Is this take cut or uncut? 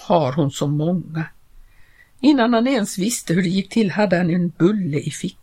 uncut